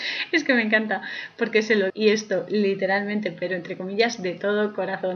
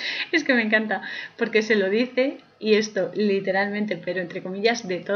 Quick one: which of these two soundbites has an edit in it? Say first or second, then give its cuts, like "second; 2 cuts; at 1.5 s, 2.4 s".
first; 1 cut; at 1.9 s